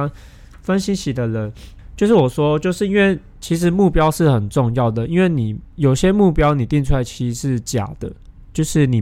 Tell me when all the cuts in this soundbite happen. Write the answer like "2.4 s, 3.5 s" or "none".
5.7 s